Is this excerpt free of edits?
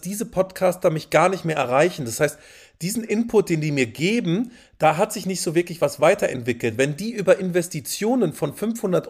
yes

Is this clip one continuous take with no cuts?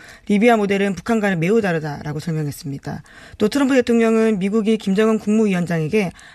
yes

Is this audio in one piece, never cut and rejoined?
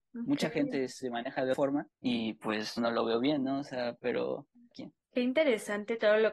no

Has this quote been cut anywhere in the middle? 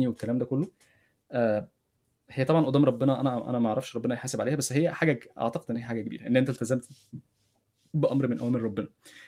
no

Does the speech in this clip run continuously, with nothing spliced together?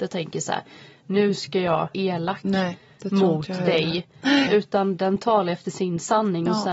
no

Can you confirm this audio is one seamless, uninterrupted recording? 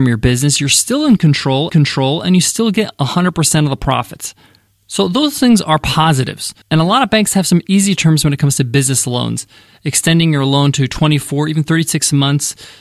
no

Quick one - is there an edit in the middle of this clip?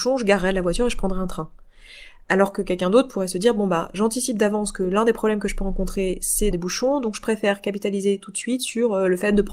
yes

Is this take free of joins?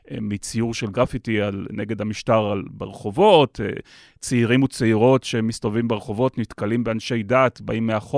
yes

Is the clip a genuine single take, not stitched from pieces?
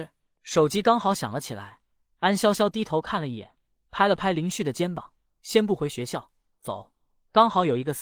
yes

